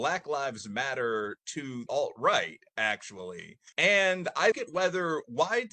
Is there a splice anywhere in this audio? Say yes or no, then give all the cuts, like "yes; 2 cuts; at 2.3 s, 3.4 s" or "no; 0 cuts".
yes; 3 cuts; at 1.9 s, 3.7 s, 4.5 s